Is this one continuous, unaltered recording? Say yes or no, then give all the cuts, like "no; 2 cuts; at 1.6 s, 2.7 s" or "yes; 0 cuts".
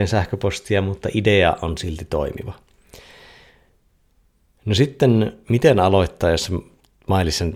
yes; 0 cuts